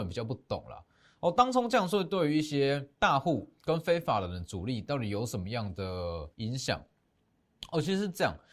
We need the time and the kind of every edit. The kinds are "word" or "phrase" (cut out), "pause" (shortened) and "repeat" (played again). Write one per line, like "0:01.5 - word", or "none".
0:02.9 - pause
0:06.3 - pause